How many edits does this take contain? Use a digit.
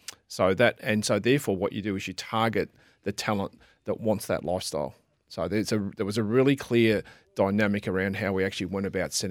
0